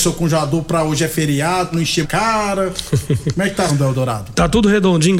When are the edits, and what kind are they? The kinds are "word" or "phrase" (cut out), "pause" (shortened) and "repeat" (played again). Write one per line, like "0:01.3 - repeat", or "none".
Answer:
0:01.7 - word
0:02.0 - word
0:03.7 - word

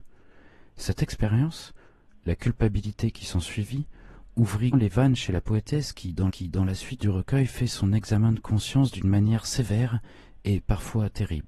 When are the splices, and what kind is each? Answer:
0:04.7 - word
0:06.3 - repeat

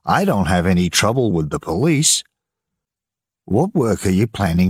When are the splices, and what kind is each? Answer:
none

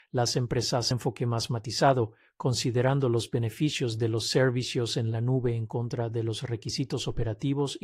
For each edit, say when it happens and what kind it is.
0:00.9 - phrase

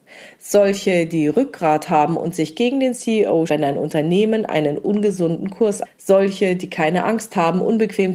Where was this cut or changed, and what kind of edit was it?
0:03.5 - word
0:05.8 - phrase

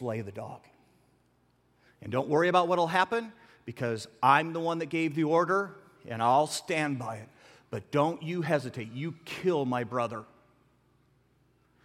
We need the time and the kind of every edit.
none

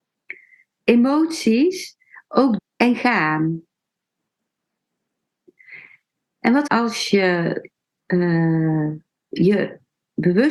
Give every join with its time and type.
0:02.6 - phrase
0:06.7 - phrase

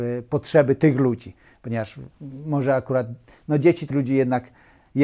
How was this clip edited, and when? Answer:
0:03.9 - word

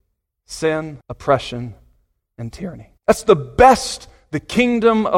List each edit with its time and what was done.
0:01.0 - pause
0:03.0 - pause

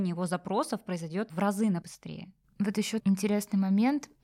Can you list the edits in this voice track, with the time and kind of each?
0:01.3 - word
0:01.8 - word
0:03.0 - word

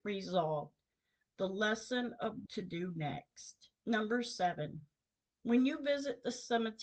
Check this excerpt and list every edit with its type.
0:02.5 - word
0:03.7 - pause

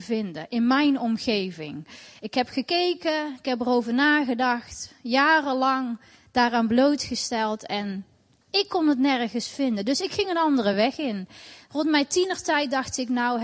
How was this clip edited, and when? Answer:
none

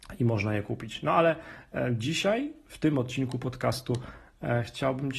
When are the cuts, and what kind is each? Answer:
none

